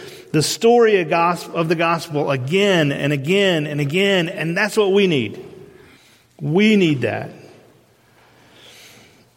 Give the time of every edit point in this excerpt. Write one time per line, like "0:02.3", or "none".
0:06.0